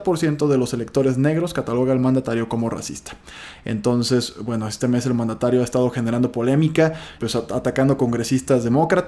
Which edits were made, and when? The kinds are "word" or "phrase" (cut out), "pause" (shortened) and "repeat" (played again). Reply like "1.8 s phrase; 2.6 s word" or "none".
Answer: 7.2 s word

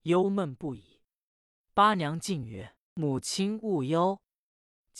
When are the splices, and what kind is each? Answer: none

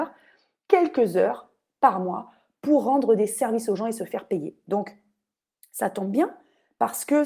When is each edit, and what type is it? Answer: none

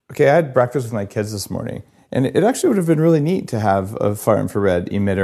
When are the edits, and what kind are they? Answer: none

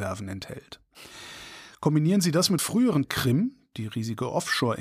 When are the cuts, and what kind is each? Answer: 2.6 s word; 3.0 s phrase

